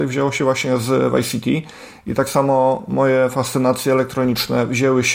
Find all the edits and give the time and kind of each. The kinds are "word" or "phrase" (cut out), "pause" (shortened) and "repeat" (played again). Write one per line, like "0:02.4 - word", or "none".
none